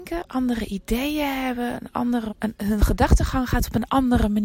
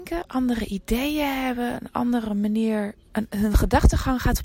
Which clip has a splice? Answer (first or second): first